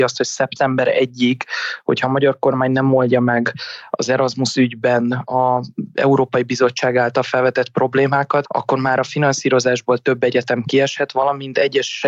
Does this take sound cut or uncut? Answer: uncut